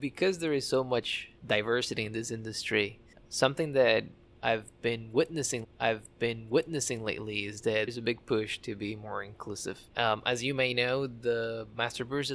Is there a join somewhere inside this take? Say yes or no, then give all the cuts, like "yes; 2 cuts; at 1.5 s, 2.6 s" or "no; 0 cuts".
yes; 5 cuts; at 1.4 s, 3.1 s, 5.6 s, 7.9 s, 9.9 s